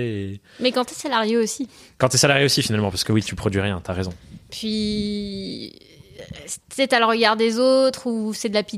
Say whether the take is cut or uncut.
uncut